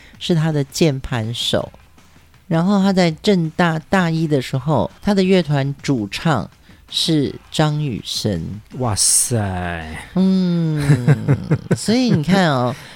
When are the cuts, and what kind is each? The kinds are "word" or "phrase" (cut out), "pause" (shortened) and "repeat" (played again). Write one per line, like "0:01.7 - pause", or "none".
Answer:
0:05.0 - pause